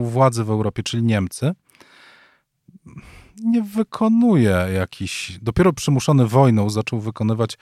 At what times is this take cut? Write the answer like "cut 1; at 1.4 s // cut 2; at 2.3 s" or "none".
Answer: none